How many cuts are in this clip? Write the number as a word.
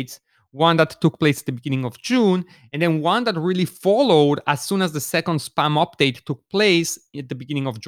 zero